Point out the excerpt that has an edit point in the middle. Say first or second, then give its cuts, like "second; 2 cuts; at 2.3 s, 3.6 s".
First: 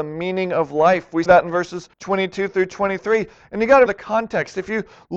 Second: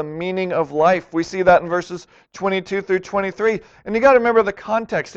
first; 3 cuts; at 1.3 s, 1.9 s, 3.9 s